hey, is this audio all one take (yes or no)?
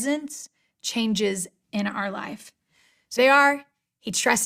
no